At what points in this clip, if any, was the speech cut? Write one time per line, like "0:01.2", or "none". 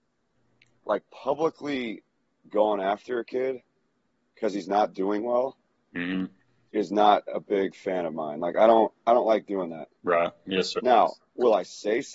none